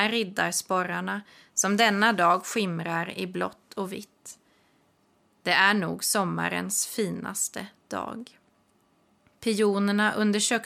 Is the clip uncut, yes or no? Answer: yes